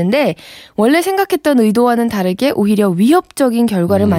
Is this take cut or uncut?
uncut